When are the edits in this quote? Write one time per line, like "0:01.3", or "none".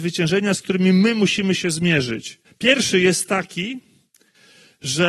0:02.4